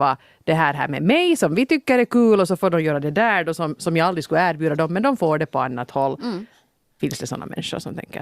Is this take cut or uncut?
uncut